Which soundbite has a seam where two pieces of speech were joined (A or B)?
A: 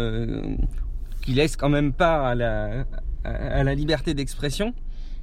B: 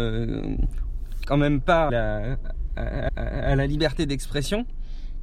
B